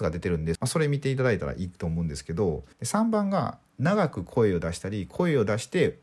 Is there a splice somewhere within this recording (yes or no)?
yes